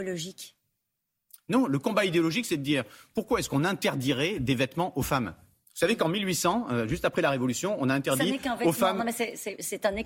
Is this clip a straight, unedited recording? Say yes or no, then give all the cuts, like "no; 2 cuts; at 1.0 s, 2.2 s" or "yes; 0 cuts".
yes; 0 cuts